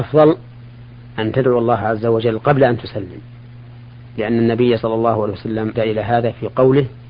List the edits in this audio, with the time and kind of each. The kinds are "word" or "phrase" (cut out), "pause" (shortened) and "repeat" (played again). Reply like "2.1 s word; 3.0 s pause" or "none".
5.7 s word